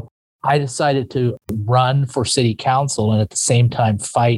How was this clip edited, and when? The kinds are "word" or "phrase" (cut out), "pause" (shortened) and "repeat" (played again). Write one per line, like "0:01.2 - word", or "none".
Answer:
0:01.4 - pause